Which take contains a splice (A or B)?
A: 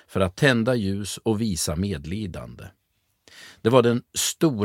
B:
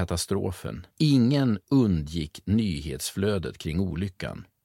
B